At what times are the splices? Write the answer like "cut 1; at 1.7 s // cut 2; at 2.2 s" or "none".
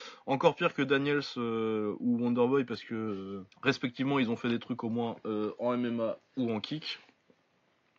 cut 1; at 3.5 s